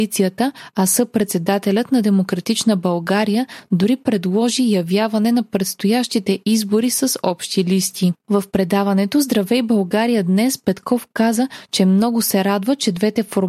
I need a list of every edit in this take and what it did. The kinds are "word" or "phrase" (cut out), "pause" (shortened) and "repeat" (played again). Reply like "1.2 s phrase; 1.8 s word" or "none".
none